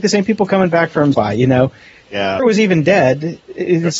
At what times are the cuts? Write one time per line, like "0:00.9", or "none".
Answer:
0:01.1
0:02.4

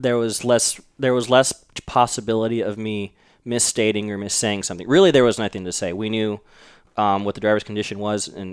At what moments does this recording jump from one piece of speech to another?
none

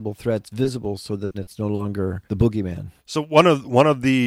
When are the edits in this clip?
0:01.3
0:02.2
0:03.0

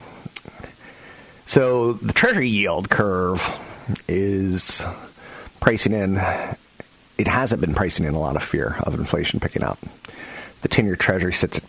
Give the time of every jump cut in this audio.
none

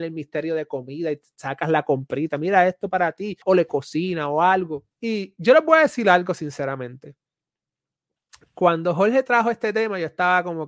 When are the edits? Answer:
0:03.4
0:04.9

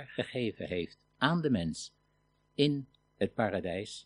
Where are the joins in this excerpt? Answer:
none

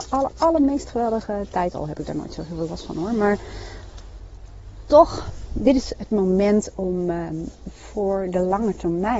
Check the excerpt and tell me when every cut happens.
none

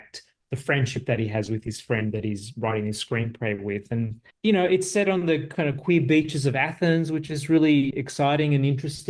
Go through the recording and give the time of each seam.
0:04.3
0:07.9

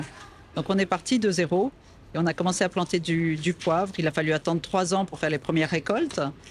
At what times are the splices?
none

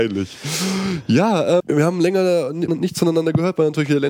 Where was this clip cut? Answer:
0:01.6
0:02.7

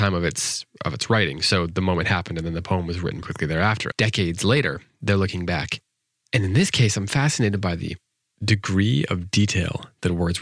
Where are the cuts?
0:03.2
0:03.9

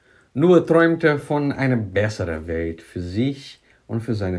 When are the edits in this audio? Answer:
none

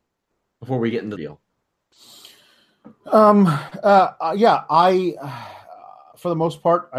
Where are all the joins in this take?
0:01.2

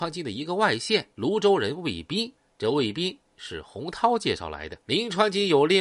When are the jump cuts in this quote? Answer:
0:01.1
0:02.4
0:04.8

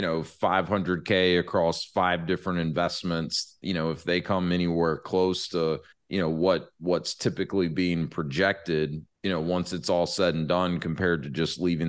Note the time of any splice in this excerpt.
0:05.9
0:09.1

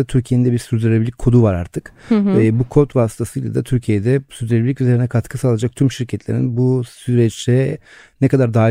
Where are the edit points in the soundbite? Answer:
none

